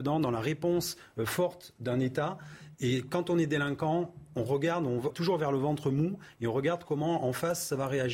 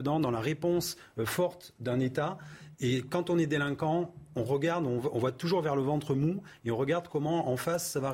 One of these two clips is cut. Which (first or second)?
first